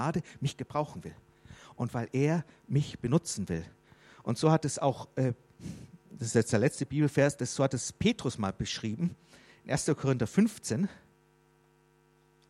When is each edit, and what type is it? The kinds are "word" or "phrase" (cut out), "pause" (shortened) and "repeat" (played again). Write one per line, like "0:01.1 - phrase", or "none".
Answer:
none